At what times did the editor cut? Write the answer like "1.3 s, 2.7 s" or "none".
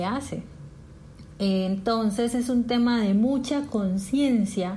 none